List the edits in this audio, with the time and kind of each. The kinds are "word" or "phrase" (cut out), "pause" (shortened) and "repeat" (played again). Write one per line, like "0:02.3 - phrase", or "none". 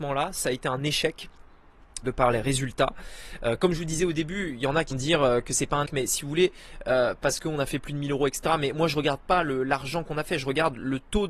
0:02.0 - word
0:04.9 - word
0:05.9 - word